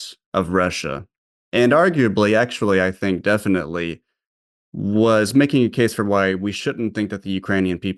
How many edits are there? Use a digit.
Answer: 0